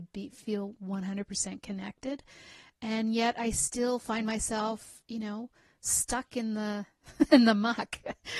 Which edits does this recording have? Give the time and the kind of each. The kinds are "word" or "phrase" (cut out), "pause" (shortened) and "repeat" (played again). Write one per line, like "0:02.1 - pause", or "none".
none